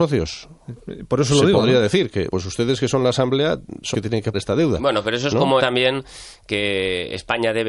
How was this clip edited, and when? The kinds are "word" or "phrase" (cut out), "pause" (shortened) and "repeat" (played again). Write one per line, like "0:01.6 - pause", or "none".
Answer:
0:02.3 - word
0:03.9 - word
0:04.3 - word
0:05.6 - word